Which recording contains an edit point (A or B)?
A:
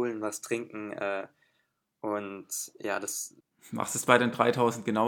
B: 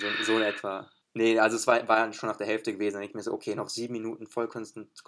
B